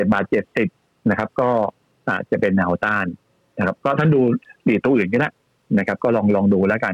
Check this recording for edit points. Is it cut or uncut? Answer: uncut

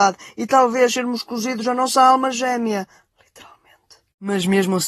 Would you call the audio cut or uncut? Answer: uncut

